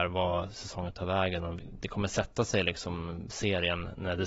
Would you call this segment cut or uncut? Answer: uncut